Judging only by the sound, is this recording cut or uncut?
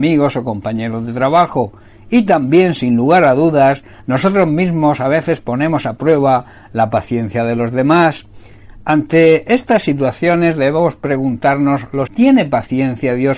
cut